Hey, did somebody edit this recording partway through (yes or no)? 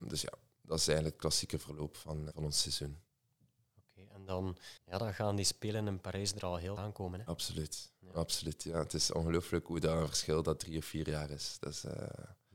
yes